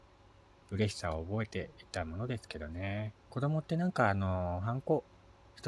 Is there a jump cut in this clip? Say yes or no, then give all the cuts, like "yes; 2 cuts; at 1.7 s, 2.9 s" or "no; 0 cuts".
yes; 1 cut; at 3.2 s